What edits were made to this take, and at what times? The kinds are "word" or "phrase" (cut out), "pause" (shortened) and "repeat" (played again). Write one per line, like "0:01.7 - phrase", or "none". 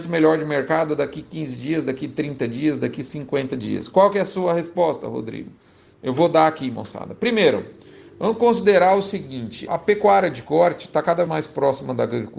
0:09.7 - word
0:11.3 - word